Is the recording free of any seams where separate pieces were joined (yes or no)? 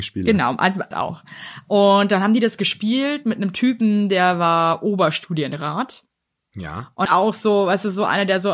no